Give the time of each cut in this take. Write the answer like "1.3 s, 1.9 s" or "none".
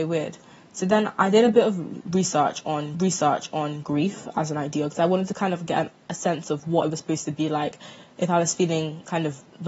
2.9 s